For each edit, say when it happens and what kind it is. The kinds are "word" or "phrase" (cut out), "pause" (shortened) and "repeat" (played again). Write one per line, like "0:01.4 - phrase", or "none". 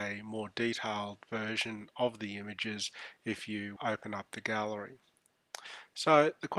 0:03.8 - word

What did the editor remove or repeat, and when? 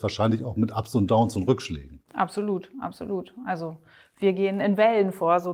none

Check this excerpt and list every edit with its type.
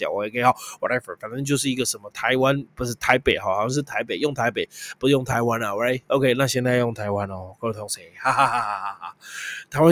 none

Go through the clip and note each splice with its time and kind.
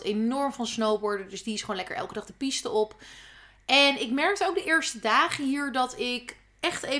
none

